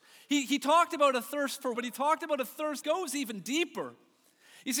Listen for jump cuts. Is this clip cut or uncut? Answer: cut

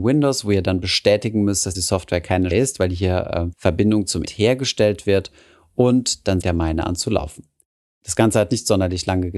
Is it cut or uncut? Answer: cut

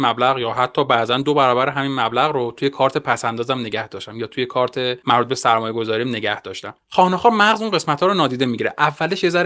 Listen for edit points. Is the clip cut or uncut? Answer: uncut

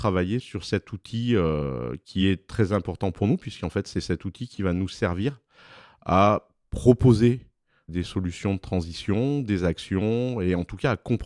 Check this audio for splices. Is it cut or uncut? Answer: uncut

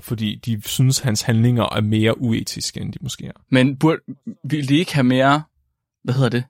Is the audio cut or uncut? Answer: uncut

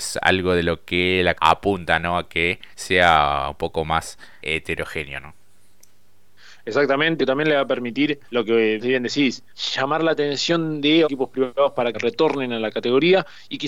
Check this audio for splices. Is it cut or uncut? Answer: cut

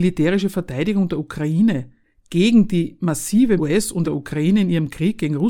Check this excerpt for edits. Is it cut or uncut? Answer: cut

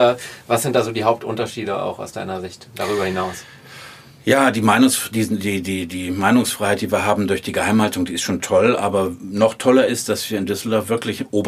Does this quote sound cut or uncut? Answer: uncut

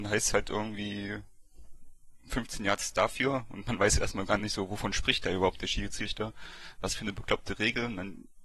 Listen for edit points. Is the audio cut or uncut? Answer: uncut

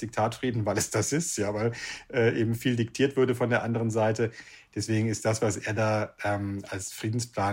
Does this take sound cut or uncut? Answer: uncut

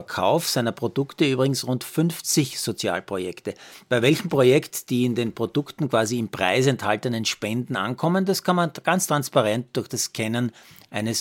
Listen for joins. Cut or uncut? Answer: uncut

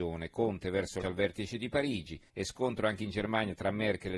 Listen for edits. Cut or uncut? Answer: cut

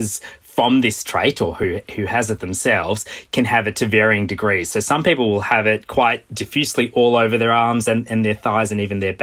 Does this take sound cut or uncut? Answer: uncut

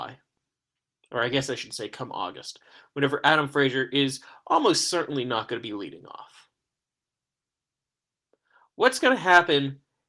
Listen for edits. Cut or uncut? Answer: uncut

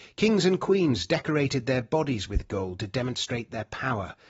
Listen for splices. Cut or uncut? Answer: uncut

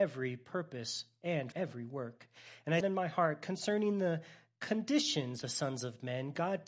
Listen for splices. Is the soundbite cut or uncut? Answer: cut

